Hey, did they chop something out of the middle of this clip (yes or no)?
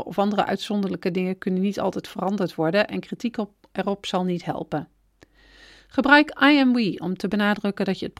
no